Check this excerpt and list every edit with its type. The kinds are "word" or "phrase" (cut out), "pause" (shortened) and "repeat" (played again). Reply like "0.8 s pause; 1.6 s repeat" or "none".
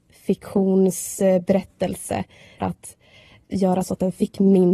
2.6 s phrase